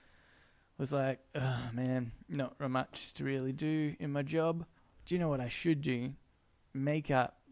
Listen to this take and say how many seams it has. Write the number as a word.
one